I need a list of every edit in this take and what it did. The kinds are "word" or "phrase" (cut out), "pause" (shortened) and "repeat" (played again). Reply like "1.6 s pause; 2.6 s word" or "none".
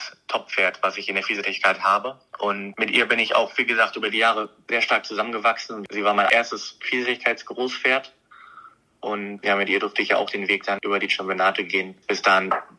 none